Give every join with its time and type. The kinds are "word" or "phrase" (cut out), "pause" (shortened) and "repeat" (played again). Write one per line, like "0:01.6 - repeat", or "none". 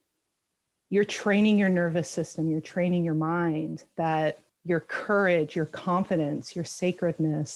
0:04.5 - pause